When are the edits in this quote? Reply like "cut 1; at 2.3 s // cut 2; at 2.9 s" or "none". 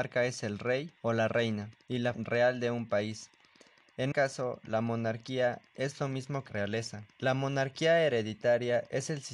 cut 1; at 1.0 s // cut 2; at 1.8 s // cut 3; at 2.1 s // cut 4; at 4.1 s // cut 5; at 6.5 s // cut 6; at 7.1 s